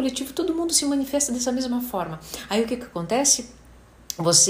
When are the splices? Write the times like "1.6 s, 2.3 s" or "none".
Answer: none